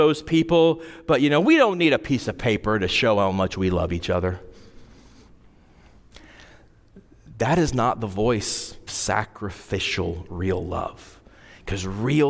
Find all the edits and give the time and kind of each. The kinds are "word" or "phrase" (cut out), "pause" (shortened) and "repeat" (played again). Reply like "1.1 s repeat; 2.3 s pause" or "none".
8.9 s word